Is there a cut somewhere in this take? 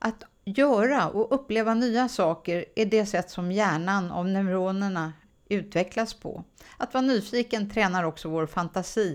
no; 0 cuts

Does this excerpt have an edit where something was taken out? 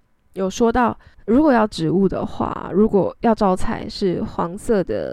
yes; 1 cut; at 1.1 s

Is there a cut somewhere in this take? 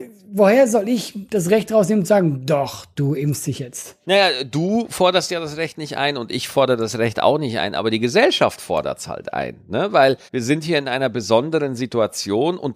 yes; 2 cuts; at 4.0 s, 10.3 s

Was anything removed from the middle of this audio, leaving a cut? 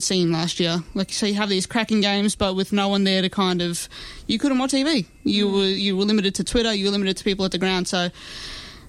yes; 1 cut; at 4.7 s

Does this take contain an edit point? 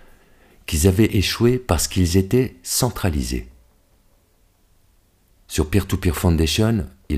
no; 0 cuts

